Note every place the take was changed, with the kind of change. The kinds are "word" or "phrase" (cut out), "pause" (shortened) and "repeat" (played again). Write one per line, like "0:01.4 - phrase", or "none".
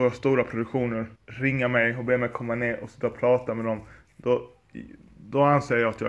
0:01.2 - pause